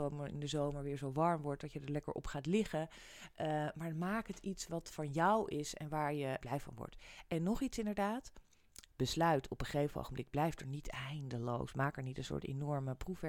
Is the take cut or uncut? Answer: cut